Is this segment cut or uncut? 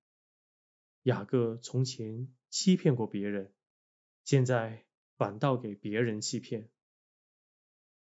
uncut